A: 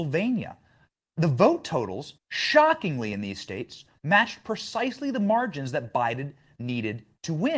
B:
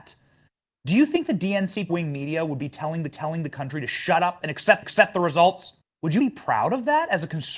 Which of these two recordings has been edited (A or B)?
B